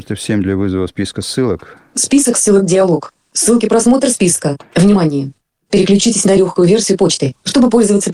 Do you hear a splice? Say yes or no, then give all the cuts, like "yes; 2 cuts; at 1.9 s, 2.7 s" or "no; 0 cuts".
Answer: no; 0 cuts